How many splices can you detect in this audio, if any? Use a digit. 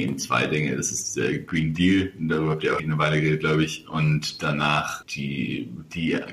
2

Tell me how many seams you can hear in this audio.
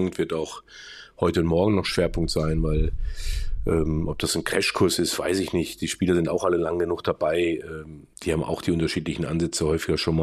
1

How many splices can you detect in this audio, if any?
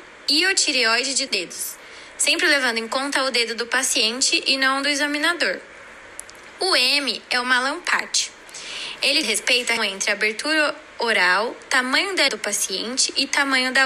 4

